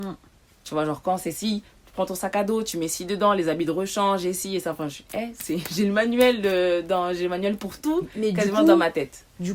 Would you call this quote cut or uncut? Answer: uncut